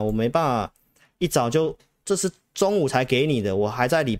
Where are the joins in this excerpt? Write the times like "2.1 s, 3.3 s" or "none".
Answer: none

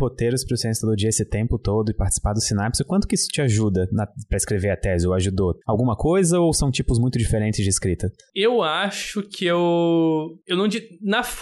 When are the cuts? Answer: 5.6 s

